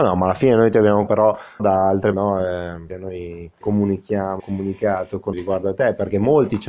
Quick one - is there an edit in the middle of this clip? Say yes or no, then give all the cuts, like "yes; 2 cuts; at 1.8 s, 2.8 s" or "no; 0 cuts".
yes; 7 cuts; at 1.1 s, 1.6 s, 2.1 s, 2.9 s, 3.6 s, 4.4 s, 5.3 s